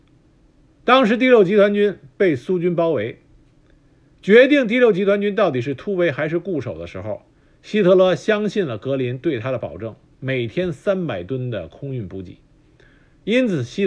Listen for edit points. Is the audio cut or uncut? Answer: uncut